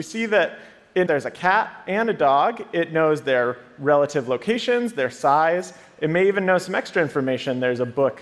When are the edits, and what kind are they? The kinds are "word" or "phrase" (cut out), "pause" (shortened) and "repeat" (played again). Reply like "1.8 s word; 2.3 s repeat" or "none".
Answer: 1.1 s phrase